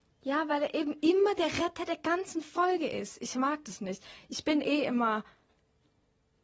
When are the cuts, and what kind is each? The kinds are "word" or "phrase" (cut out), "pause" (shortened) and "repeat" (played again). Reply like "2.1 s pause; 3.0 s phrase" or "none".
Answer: none